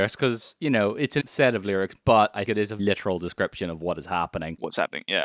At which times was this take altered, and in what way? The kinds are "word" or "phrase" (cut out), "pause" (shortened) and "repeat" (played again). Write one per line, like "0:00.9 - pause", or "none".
0:01.2 - word
0:02.4 - word
0:02.8 - word